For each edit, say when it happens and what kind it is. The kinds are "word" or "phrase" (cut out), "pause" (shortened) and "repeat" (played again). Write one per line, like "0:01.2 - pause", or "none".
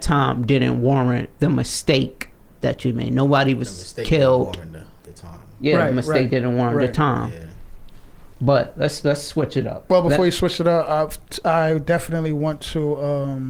0:01.3 - pause
0:02.4 - pause

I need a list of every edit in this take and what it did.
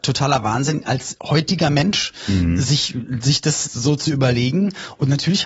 none

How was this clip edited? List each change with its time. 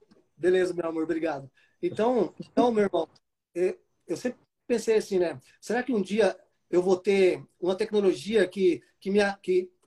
none

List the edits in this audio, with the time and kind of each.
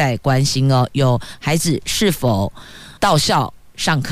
0:03.0 - pause

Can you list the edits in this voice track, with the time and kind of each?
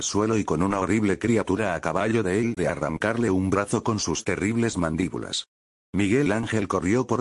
0:02.6 - word

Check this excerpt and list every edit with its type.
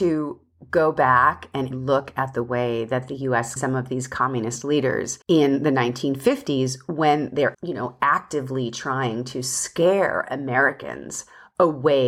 0:01.7 - word
0:03.6 - phrase
0:05.2 - pause
0:07.5 - word

